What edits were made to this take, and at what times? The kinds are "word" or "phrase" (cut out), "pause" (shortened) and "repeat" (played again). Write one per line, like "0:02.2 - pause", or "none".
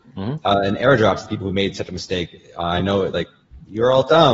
none